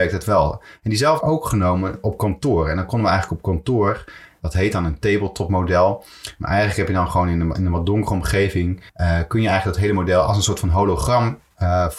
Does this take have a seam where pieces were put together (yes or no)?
yes